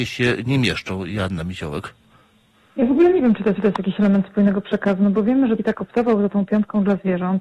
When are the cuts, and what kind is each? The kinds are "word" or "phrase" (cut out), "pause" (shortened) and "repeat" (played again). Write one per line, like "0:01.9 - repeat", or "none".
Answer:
0:03.6 - repeat
0:05.6 - phrase